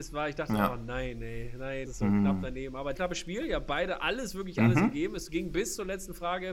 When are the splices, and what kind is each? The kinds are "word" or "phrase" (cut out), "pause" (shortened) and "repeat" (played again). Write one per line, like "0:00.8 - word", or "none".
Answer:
0:01.9 - word
0:03.0 - phrase